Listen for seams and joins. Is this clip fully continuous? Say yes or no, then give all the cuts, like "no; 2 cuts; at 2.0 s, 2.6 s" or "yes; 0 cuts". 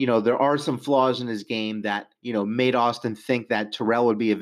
no; 1 cut; at 2.2 s